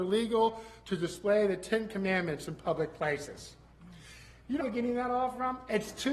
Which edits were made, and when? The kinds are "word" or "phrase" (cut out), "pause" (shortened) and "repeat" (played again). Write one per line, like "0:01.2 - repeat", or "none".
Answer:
0:04.6 - word